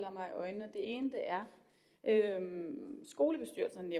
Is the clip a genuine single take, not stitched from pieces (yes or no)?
yes